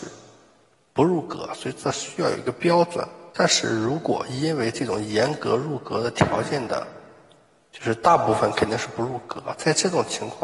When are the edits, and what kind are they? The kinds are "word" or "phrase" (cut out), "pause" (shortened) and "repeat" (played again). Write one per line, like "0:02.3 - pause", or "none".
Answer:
0:03.3 - pause